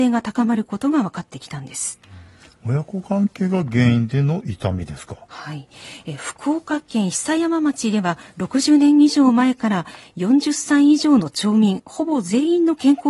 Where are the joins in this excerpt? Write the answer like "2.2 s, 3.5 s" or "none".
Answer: none